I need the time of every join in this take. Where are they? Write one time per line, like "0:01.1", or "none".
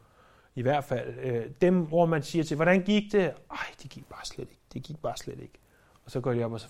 none